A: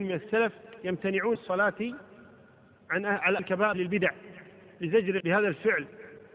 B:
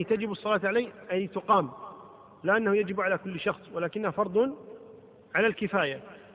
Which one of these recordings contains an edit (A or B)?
A